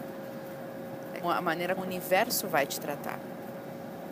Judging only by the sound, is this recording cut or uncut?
cut